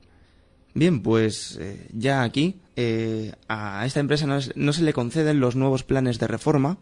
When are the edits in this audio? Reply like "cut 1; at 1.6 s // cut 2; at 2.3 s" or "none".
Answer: cut 1; at 2.7 s